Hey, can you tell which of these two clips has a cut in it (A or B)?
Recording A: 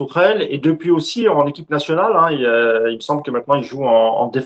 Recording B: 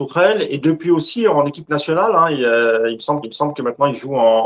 B